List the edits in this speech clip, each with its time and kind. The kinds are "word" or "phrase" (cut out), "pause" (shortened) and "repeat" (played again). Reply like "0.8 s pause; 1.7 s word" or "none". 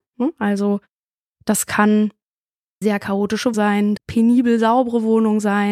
2.8 s word; 3.5 s word; 4.0 s phrase

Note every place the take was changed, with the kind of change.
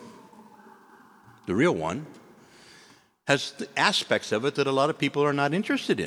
none

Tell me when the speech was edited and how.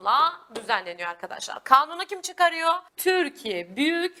2.9 s pause

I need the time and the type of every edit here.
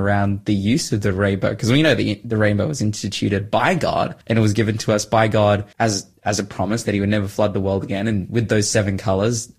4.2 s pause; 5.7 s pause

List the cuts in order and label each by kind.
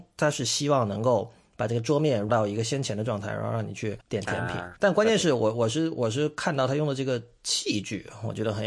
2.3 s word; 4.0 s pause; 4.8 s pause

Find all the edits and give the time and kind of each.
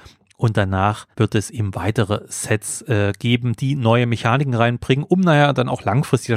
1.1 s pause

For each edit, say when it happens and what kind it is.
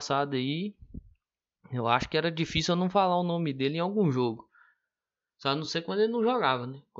none

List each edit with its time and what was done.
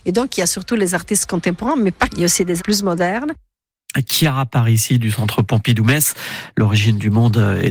2.1 s word; 2.6 s word

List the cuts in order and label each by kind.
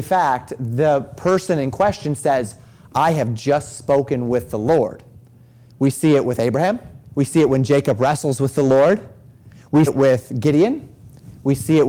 7.0 s pause; 9.9 s word

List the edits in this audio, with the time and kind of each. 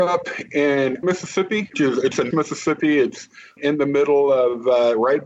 1.0 s word; 1.7 s word; 2.3 s word; 3.6 s word

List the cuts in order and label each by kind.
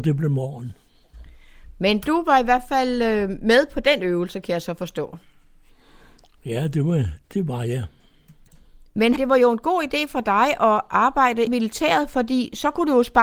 9.2 s word; 11.5 s phrase

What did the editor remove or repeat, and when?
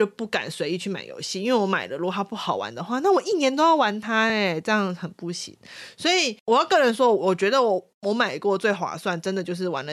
none

